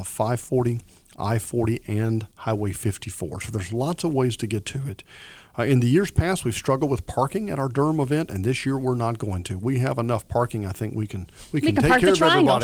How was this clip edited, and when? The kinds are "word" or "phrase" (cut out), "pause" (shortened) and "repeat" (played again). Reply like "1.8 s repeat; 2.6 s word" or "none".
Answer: 2.3 s pause